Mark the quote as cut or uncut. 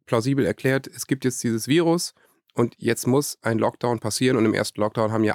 uncut